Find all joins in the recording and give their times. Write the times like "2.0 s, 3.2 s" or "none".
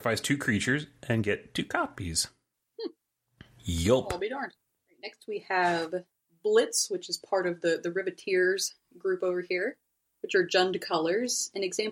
none